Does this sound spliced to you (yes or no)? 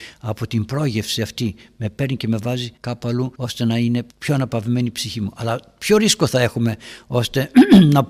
yes